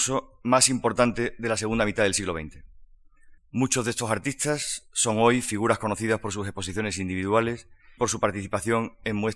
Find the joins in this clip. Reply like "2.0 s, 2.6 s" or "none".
3.4 s, 8.0 s